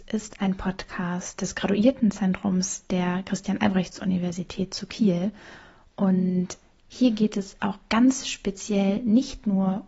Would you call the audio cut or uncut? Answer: uncut